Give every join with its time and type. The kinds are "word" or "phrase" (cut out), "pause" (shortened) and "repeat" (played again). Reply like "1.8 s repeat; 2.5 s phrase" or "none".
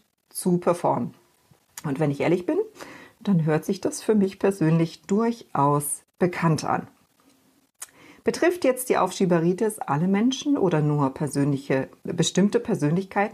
none